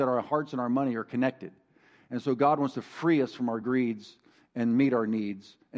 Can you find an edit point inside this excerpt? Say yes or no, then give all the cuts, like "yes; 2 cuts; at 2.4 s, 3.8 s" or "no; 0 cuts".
no; 0 cuts